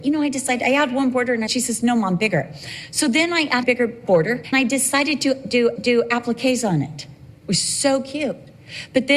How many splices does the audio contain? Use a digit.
4